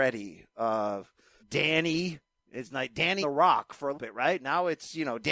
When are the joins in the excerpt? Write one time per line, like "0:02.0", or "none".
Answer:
0:01.4
0:02.7
0:03.2
0:03.9